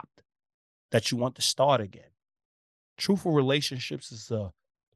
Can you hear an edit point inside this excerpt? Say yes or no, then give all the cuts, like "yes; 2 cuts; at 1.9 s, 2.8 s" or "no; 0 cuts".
no; 0 cuts